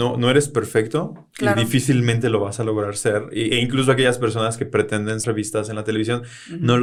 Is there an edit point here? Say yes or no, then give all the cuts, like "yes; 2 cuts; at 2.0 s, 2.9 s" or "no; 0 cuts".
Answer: yes; 1 cut; at 5.2 s